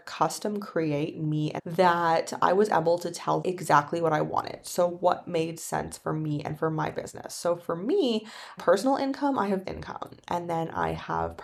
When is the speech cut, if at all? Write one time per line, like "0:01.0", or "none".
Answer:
0:01.6
0:03.4
0:08.6
0:09.6